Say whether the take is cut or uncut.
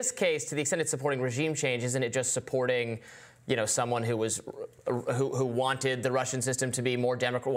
uncut